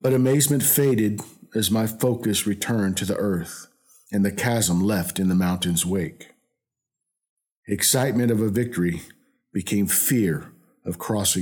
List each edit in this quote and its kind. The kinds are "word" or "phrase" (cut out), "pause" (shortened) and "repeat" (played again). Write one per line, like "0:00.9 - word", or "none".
none